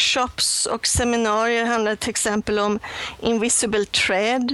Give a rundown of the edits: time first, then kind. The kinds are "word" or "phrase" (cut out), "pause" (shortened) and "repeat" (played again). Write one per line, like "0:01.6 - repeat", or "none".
none